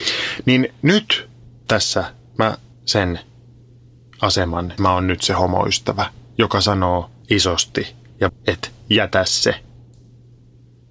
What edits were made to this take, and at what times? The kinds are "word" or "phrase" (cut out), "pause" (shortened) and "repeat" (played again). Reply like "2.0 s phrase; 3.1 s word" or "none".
1.7 s word; 2.7 s word; 4.8 s word; 7.2 s word; 8.3 s word